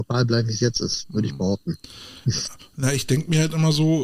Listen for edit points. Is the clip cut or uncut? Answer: uncut